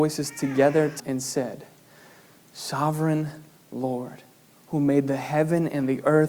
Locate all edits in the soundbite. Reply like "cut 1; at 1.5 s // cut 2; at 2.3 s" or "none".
cut 1; at 1.0 s

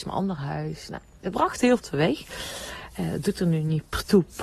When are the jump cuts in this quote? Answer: cut 1; at 1.3 s // cut 2; at 1.8 s

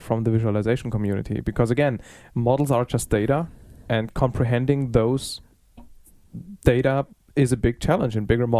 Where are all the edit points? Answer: none

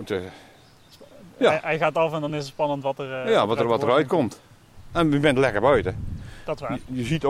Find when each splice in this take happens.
none

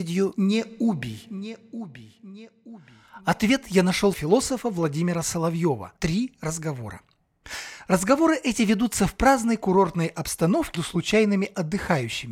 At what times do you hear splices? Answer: cut 1; at 4.1 s // cut 2; at 6.0 s // cut 3; at 10.7 s

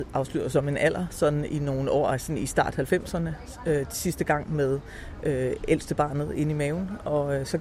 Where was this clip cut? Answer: none

